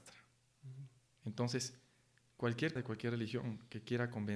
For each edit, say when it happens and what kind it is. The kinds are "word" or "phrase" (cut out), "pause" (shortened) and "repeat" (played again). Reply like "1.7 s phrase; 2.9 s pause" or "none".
2.8 s word